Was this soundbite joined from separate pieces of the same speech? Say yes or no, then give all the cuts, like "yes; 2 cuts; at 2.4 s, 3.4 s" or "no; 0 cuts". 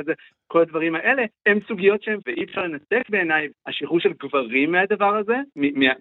yes; 3 cuts; at 1.4 s, 2.2 s, 3.5 s